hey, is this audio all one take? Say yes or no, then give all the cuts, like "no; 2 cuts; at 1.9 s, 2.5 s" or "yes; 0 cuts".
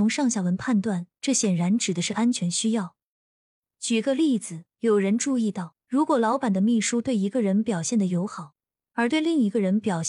no; 1 cut; at 5.8 s